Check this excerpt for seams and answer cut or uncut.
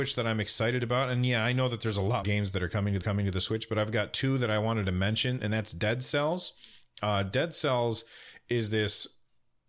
cut